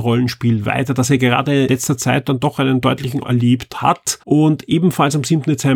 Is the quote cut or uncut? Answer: cut